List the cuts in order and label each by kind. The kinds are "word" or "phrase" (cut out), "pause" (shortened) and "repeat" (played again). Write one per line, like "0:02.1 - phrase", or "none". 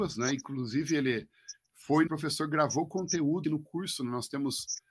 0:02.1 - word
0:03.4 - word